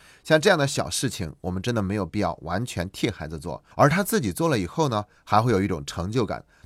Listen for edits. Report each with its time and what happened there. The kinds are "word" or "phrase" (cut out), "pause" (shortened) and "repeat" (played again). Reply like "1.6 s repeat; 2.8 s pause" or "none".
3.7 s pause